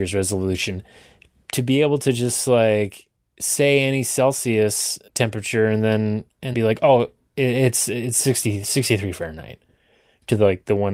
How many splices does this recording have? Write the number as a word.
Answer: three